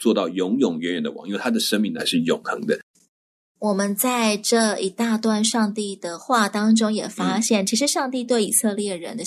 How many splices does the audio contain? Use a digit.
0